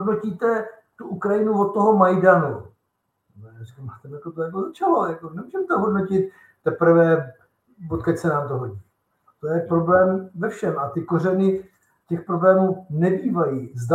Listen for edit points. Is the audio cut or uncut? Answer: uncut